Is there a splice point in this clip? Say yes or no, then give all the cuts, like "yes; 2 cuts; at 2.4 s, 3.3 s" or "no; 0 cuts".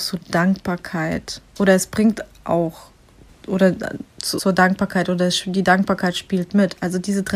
yes; 2 cuts; at 3.3 s, 4.4 s